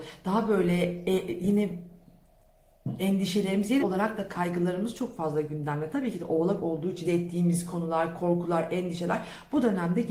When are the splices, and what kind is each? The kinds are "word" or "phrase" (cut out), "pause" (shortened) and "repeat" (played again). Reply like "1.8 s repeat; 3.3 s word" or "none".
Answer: 3.8 s word; 7.0 s phrase

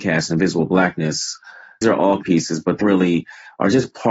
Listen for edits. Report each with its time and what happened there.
1.8 s word; 2.2 s word; 2.8 s word

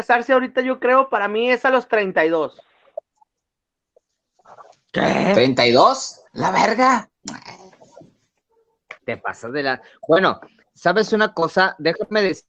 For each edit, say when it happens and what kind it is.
6.3 s pause; 9.0 s pause

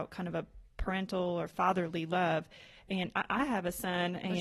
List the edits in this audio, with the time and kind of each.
none

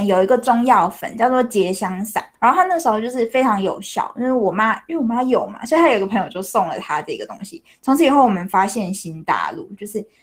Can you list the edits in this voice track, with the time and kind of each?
2.3 s pause

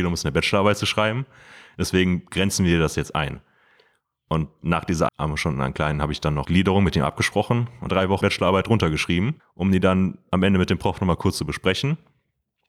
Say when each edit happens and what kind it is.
5.1 s word; 6.4 s phrase; 7.9 s phrase; 8.2 s word; 9.4 s pause

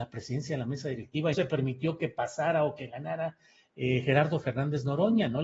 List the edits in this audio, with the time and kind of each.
1.3 s word

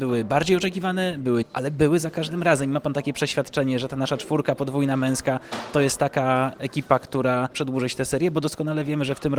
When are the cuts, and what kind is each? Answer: 1.4 s word; 7.5 s word

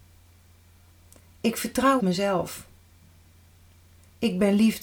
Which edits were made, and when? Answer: 2.0 s word

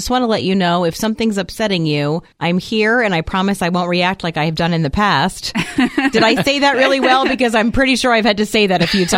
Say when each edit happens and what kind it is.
2.3 s pause

